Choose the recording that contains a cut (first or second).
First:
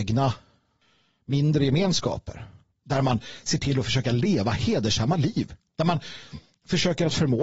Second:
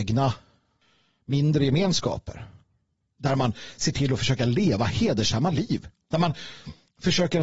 first